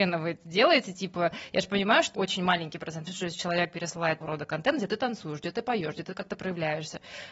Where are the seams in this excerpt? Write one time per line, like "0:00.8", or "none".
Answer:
0:02.1
0:03.1
0:04.2